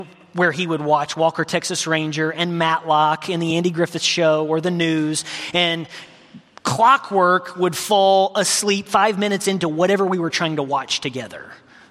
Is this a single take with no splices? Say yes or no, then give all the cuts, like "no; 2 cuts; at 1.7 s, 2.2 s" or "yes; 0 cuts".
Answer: yes; 0 cuts